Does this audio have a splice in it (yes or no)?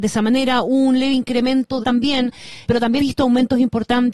yes